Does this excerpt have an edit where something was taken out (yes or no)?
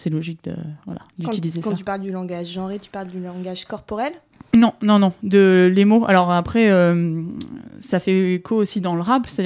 no